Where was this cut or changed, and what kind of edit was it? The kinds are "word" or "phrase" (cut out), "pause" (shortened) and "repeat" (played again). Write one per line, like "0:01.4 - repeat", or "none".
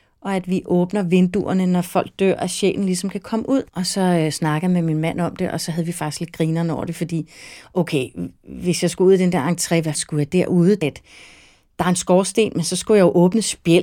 0:03.7 - pause
0:09.9 - word
0:10.8 - word